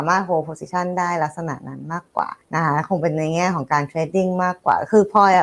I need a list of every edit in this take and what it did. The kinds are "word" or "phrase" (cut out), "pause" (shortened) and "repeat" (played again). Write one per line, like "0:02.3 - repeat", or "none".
0:02.4 - pause